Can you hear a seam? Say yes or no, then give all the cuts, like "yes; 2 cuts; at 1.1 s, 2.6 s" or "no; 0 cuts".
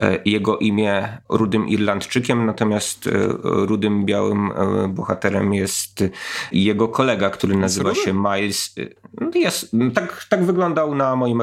no; 0 cuts